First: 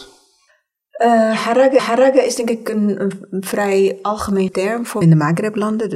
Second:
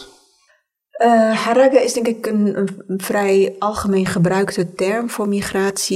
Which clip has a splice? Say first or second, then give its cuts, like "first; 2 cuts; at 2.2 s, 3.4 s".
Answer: first; 3 cuts; at 1.8 s, 4.5 s, 5.0 s